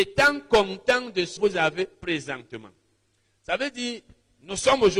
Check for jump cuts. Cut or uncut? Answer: cut